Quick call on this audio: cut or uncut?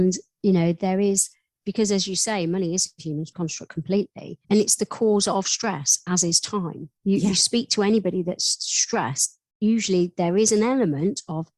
cut